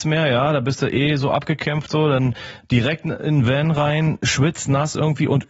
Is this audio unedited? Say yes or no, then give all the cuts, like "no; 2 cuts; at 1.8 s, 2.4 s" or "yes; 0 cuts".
yes; 0 cuts